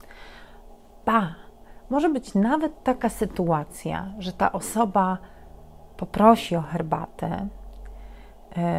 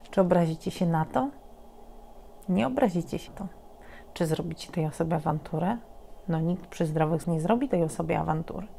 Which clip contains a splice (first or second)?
second